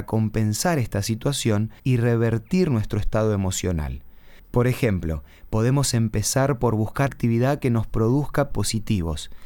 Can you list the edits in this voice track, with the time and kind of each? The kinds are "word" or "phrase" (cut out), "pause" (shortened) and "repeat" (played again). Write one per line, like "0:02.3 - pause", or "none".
0:01.8 - pause
0:07.1 - word
0:08.5 - word